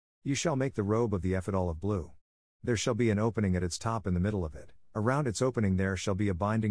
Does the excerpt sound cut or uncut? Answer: uncut